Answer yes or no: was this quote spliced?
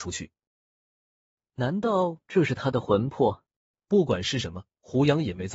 yes